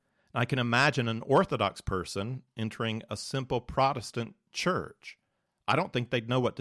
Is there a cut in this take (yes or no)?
no